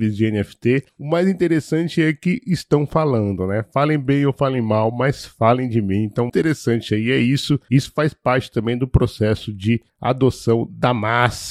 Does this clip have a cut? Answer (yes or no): yes